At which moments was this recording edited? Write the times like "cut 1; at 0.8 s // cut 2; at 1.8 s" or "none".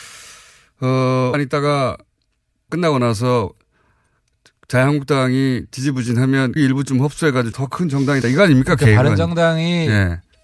cut 1; at 1.3 s // cut 2; at 2.7 s // cut 3; at 6.6 s // cut 4; at 7.5 s // cut 5; at 8.2 s